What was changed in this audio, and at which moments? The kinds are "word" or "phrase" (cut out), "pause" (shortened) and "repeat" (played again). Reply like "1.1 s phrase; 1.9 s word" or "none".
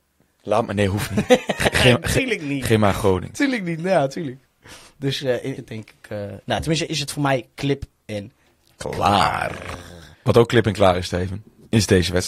5.6 s phrase; 6.4 s pause; 6.9 s word; 10.1 s pause